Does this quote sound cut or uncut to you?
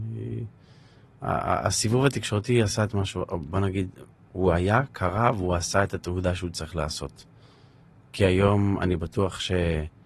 uncut